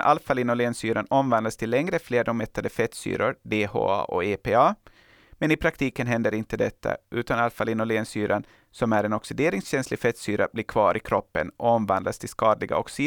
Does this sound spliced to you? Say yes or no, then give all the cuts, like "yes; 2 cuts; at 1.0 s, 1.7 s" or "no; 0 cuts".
no; 0 cuts